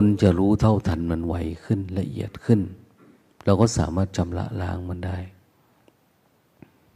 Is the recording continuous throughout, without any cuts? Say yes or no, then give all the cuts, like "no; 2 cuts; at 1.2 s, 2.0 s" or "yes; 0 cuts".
yes; 0 cuts